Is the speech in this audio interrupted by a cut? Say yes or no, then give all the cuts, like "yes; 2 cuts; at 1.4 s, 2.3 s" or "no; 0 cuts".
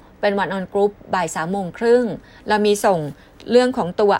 no; 0 cuts